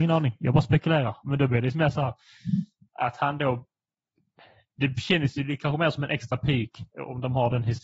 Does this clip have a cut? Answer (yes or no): no